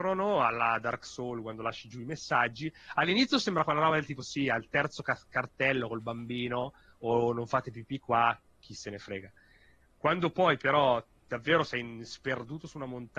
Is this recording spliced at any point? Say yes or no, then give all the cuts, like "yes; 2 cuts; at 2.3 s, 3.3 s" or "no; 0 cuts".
no; 0 cuts